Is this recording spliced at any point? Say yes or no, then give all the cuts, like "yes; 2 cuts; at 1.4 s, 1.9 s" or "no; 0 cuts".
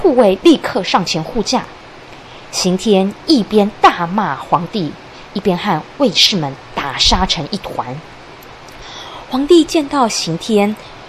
no; 0 cuts